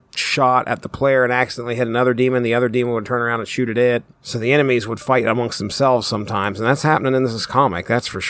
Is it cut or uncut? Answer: uncut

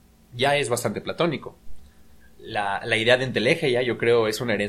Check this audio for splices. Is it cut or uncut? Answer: uncut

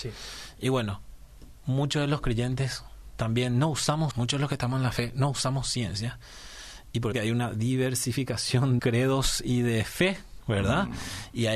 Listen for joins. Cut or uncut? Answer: cut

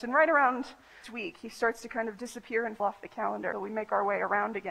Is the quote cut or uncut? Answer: cut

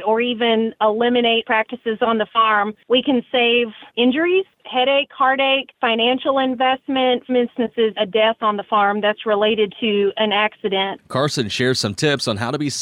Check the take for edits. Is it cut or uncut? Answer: cut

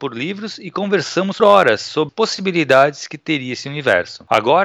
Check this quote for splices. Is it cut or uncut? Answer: cut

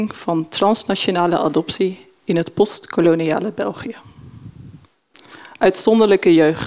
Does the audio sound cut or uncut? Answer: uncut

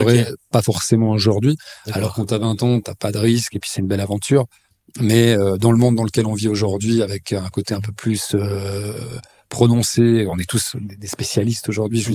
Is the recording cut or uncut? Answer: uncut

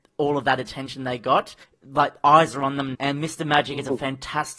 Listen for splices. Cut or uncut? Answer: cut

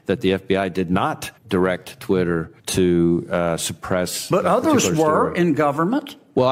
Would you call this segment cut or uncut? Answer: cut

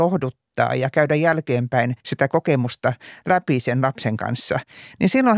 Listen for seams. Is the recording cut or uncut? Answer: cut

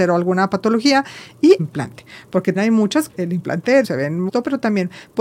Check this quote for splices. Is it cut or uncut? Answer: cut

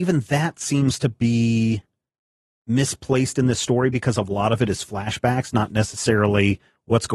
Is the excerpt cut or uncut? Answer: uncut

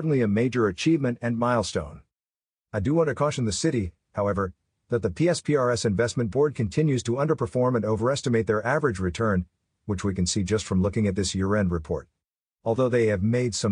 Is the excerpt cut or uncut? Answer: uncut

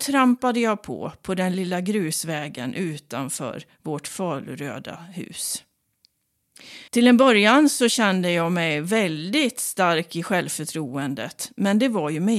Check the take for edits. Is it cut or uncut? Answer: cut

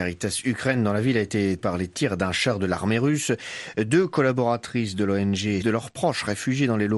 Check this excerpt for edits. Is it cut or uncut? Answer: cut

